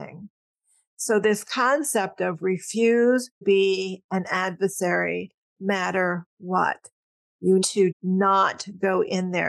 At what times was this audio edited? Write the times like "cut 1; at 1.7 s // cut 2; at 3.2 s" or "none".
cut 1; at 3.4 s // cut 2; at 5.6 s // cut 3; at 7.6 s // cut 4; at 7.9 s